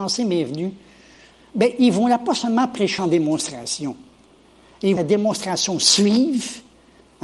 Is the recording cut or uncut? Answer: cut